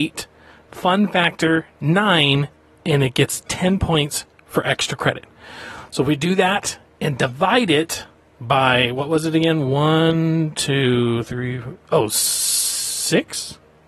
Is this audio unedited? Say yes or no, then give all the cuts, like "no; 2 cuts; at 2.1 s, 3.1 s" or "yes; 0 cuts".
yes; 0 cuts